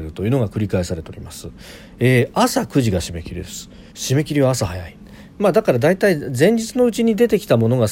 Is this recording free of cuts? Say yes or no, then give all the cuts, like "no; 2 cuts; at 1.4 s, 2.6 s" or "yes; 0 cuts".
no; 1 cut; at 3.9 s